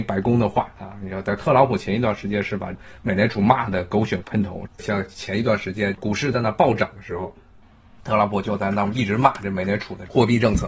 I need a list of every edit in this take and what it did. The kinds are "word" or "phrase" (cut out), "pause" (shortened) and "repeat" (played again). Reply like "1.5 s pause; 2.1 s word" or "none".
4.7 s pause